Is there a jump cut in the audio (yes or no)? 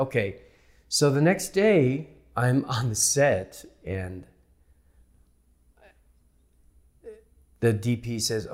no